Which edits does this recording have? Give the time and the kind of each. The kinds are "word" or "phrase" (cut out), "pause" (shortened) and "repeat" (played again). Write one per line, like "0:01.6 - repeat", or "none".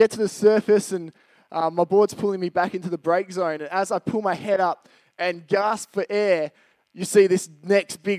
none